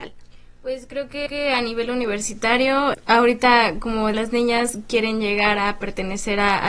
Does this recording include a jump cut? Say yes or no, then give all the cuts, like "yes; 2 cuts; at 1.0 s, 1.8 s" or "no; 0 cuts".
yes; 3 cuts; at 1.3 s, 2.9 s, 4.1 s